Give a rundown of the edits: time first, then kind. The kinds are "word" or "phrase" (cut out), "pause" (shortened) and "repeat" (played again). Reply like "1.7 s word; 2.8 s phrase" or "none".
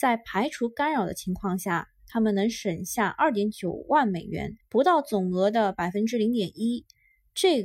4.6 s pause